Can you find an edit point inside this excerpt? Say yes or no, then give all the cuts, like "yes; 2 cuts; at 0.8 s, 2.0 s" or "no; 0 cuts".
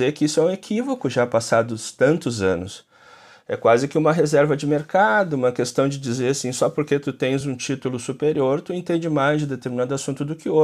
no; 0 cuts